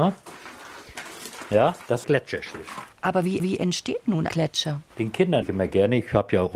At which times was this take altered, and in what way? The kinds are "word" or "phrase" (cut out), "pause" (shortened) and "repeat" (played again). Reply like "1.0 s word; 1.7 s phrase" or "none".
2.0 s phrase; 2.9 s pause; 3.4 s repeat; 4.3 s word; 4.9 s pause; 5.4 s word